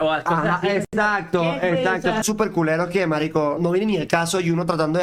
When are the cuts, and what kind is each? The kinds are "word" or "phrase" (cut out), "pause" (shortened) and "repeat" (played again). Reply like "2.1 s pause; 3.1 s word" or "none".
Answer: 2.2 s word; 3.6 s word